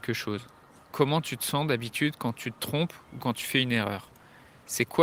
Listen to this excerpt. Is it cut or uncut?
uncut